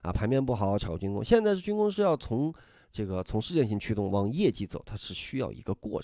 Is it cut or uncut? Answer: uncut